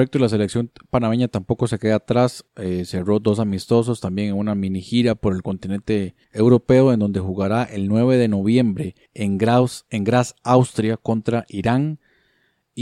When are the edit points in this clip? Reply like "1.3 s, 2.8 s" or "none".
2.5 s, 6.2 s, 9.1 s